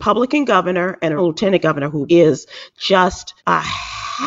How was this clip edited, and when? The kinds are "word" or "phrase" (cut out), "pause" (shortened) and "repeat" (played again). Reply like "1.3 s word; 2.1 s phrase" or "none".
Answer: 1.2 s word; 2.1 s word; 3.4 s pause